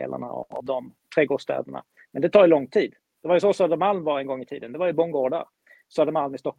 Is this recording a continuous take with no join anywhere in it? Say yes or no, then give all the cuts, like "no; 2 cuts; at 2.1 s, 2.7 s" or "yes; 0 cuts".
yes; 0 cuts